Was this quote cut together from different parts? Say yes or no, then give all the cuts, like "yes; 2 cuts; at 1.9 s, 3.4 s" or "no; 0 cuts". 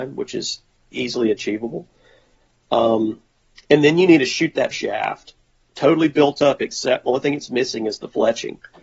yes; 2 cuts; at 0.9 s, 4.7 s